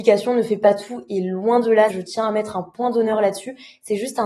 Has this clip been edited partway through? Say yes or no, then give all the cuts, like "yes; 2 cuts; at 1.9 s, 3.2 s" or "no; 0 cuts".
yes; 1 cut; at 1.9 s